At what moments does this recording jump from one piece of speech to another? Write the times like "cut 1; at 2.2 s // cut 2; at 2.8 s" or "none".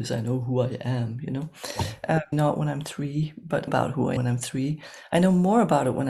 cut 1; at 2.3 s // cut 2; at 3.7 s // cut 3; at 4.2 s